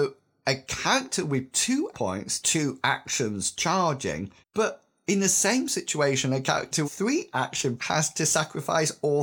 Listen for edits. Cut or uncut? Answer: cut